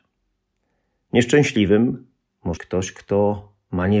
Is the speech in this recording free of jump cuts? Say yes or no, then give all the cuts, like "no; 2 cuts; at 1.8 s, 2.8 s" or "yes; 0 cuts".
no; 1 cut; at 2.6 s